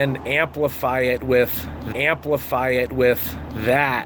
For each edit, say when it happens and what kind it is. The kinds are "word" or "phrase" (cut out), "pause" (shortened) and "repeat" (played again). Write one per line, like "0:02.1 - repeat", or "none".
0:01.9 - repeat